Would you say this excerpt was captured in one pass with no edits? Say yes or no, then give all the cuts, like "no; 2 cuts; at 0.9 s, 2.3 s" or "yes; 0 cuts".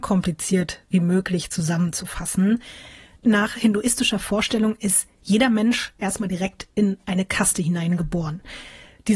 yes; 0 cuts